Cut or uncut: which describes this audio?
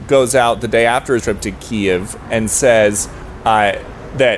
cut